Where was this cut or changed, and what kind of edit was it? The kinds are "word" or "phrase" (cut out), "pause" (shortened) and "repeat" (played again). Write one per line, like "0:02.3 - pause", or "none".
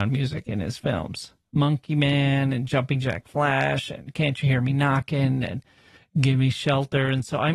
none